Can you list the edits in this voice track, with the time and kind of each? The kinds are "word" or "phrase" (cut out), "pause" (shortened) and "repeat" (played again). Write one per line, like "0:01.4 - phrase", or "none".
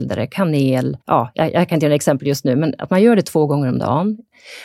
0:01.0 - pause